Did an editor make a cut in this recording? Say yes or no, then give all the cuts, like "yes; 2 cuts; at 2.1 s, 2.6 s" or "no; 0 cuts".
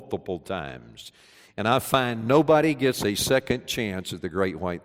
no; 0 cuts